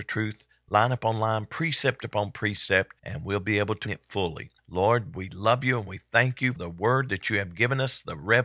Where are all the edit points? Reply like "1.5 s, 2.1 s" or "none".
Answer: 3.0 s, 3.9 s, 4.6 s, 6.6 s